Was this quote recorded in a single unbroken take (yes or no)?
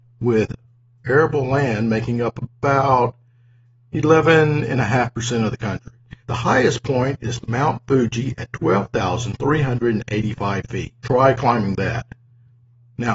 no